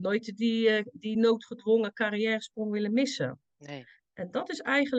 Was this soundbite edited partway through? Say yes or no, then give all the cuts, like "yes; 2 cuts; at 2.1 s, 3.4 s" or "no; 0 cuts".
no; 0 cuts